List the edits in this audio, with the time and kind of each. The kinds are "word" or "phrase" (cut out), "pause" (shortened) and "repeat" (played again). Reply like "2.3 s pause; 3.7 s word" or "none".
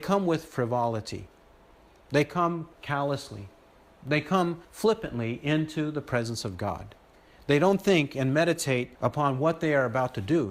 2.7 s pause; 4.6 s pause; 8.9 s pause

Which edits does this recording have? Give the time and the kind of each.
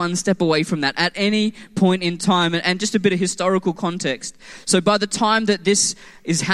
none

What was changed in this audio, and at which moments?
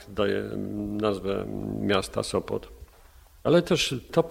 none

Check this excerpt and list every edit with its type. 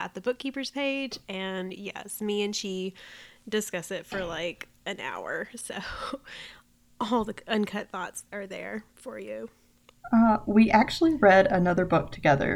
none

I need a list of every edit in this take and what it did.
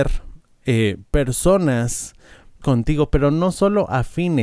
2.6 s word

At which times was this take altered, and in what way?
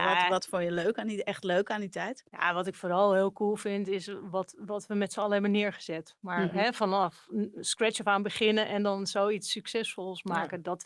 2.3 s pause

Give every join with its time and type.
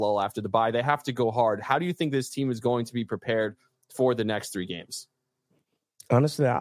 none

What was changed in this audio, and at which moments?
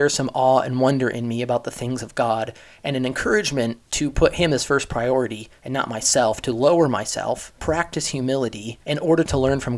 3.8 s pause; 5.6 s pause; 7.5 s pause; 8.8 s pause

